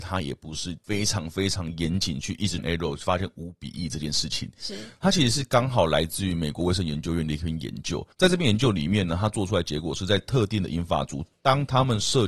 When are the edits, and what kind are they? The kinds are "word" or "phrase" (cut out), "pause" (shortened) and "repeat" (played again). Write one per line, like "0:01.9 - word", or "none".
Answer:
0:02.6 - word
0:08.1 - pause